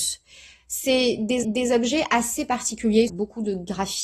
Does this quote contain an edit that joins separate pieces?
yes; 2 cuts; at 1.4 s, 3.1 s

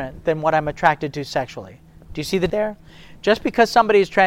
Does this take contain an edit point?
yes; 1 cut; at 2.5 s

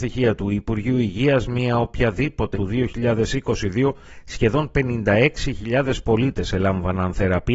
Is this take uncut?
no; 1 cut; at 2.5 s

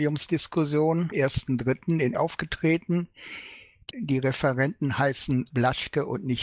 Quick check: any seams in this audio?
yes; 4 cuts; at 1.1 s, 2.1 s, 3.9 s, 5.5 s

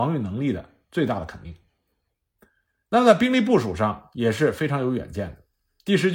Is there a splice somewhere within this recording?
no; 0 cuts

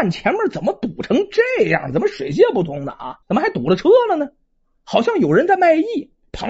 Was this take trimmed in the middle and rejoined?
yes; 1 cut; at 3.2 s

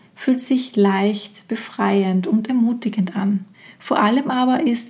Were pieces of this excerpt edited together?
yes; 1 cut; at 3.5 s

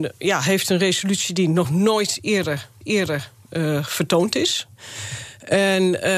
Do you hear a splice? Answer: yes; 1 cut; at 2.8 s

